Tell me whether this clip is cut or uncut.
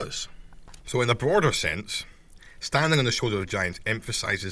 uncut